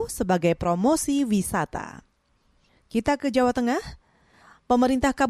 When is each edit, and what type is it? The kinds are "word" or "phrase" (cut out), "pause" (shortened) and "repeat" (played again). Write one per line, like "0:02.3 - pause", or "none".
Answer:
none